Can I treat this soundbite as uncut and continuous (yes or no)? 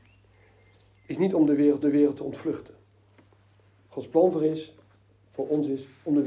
no